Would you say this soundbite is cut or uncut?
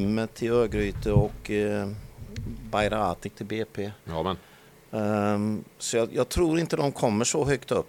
cut